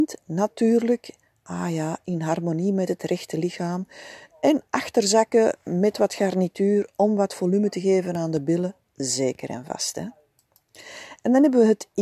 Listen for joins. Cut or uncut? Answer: uncut